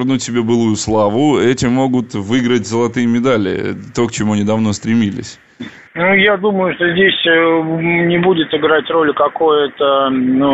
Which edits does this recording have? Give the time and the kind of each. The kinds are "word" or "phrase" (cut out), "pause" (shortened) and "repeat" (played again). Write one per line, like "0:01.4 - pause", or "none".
none

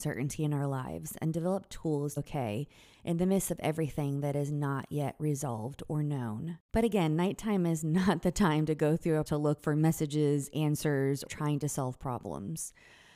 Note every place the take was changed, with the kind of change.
0:02.2 - word
0:09.3 - word
0:11.3 - word

